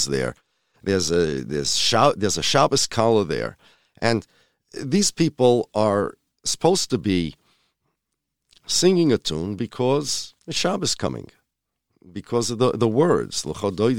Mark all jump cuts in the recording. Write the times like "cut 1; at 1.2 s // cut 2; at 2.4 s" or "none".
cut 1; at 10.4 s